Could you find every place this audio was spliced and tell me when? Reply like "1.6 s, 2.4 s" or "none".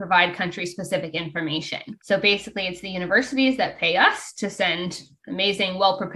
2.0 s